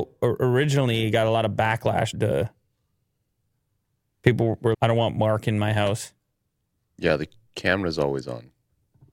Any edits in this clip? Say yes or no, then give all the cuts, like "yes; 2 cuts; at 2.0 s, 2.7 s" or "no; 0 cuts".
yes; 2 cuts; at 2.1 s, 4.7 s